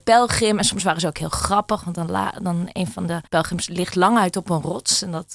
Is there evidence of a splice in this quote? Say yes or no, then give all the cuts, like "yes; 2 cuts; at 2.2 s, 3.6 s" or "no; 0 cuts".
yes; 1 cut; at 3.3 s